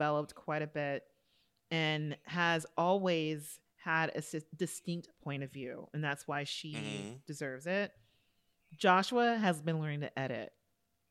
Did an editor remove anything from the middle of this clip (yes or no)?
no